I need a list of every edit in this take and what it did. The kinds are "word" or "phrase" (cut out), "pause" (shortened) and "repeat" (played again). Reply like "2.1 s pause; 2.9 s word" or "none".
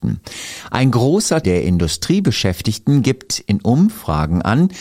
1.4 s word